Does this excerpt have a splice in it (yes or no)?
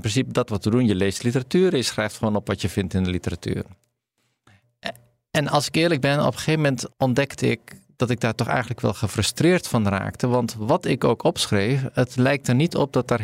yes